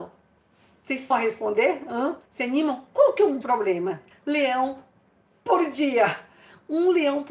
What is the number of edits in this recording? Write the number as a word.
four